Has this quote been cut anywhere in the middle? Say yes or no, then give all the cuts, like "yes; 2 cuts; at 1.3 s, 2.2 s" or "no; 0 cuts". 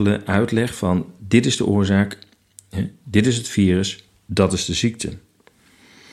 no; 0 cuts